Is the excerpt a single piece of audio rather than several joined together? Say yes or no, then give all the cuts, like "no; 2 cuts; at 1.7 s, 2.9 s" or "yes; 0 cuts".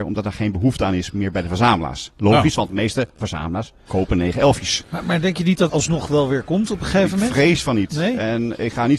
no; 2 cuts; at 3.9 s, 5.7 s